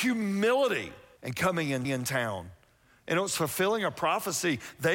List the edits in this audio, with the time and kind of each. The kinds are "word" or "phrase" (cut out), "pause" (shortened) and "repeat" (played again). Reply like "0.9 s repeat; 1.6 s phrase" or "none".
1.2 s phrase; 1.8 s repeat